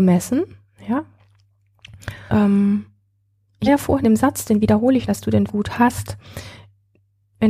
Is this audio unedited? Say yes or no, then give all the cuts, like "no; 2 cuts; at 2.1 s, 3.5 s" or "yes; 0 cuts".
no; 5 cuts; at 2.3 s, 3.7 s, 4.0 s, 5.1 s, 5.5 s